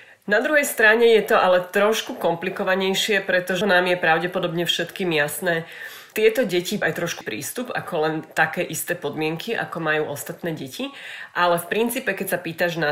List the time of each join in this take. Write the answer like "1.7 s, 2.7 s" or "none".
3.6 s, 6.1 s, 6.8 s, 7.2 s